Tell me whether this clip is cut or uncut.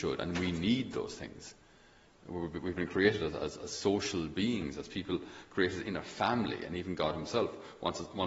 uncut